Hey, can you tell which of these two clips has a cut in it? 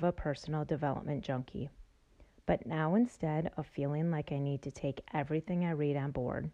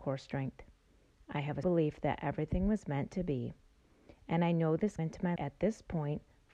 second; 3 cuts; at 1.6 s, 5.0 s, 5.4 s

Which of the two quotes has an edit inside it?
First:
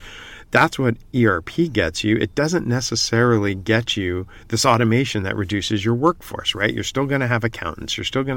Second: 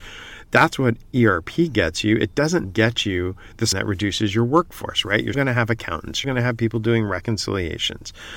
second; 4 cuts; at 2.6 s, 3.7 s, 5.3 s, 6.2 s

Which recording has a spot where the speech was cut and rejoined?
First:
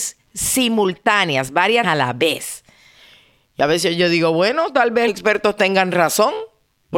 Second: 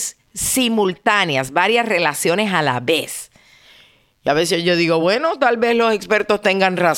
first; 2 cuts; at 1.8 s, 5.1 s

